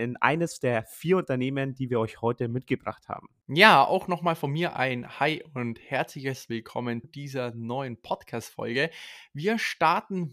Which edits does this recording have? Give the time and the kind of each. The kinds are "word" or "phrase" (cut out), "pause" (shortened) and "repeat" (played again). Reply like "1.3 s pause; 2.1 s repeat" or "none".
3.4 s pause; 7.0 s word